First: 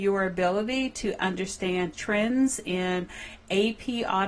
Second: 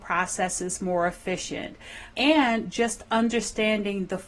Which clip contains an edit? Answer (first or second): first